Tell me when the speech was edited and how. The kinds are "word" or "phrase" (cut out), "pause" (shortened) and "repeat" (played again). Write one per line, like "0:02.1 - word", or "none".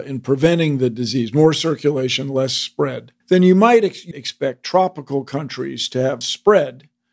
0:03.2 - pause
0:04.1 - word
0:06.2 - word